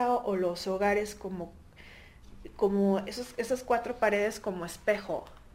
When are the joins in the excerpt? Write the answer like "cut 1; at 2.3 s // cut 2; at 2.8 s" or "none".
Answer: none